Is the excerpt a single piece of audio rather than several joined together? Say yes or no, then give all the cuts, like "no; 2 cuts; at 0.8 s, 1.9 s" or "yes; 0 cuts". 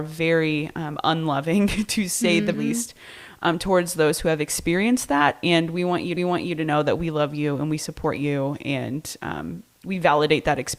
no; 2 cuts; at 2.5 s, 6.2 s